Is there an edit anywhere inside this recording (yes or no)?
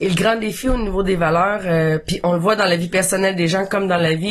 no